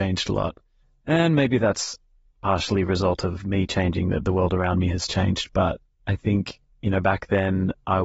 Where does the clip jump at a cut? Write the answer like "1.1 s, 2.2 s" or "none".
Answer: none